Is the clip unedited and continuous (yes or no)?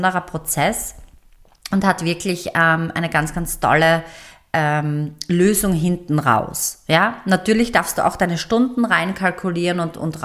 yes